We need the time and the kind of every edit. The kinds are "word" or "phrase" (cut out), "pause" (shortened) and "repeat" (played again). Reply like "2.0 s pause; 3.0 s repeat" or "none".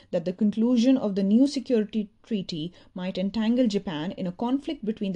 none